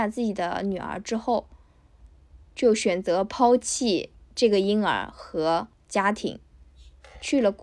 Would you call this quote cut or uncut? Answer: cut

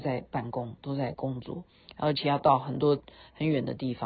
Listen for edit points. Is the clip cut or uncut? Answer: uncut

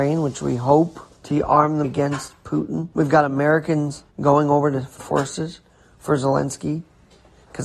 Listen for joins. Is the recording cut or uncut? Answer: cut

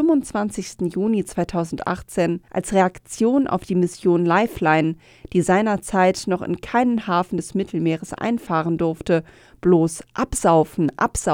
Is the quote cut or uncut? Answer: cut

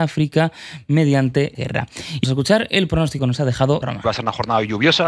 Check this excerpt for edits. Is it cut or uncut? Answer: cut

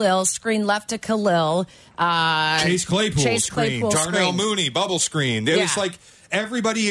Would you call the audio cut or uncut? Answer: uncut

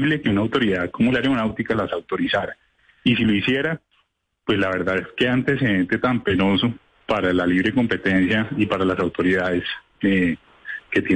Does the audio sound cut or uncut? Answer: uncut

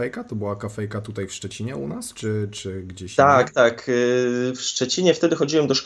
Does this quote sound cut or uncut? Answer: uncut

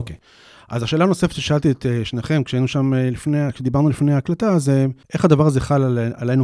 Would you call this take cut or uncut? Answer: cut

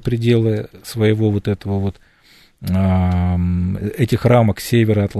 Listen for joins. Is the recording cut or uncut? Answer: uncut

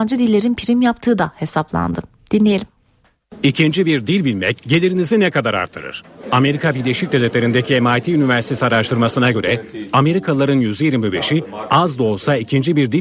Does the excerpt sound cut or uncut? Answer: uncut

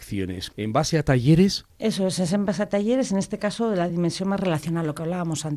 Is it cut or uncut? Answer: uncut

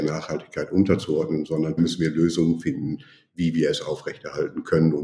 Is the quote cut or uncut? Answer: cut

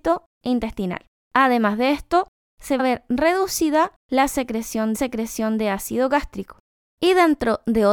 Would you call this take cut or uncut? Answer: cut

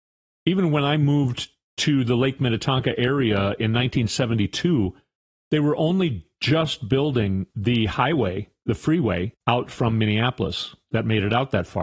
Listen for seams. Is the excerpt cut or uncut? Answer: uncut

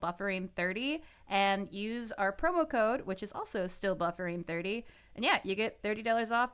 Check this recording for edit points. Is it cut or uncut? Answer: uncut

